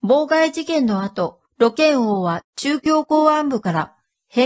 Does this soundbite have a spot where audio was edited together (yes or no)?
yes